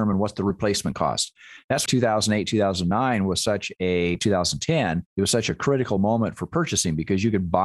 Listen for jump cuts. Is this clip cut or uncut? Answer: cut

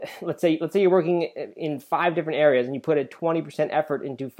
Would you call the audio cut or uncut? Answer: uncut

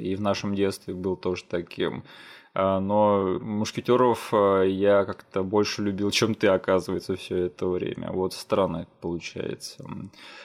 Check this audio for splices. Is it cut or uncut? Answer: uncut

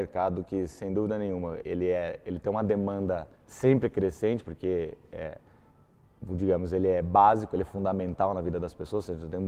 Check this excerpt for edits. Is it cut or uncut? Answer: cut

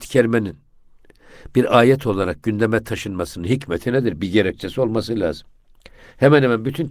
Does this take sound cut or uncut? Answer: uncut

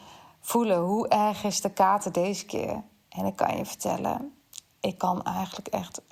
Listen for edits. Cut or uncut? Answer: uncut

